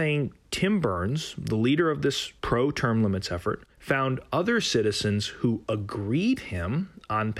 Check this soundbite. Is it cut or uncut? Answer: cut